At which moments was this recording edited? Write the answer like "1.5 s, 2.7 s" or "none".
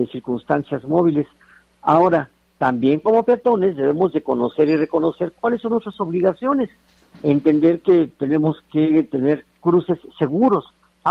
none